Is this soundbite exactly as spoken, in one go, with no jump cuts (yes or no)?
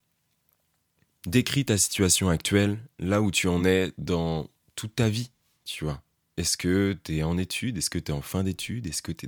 yes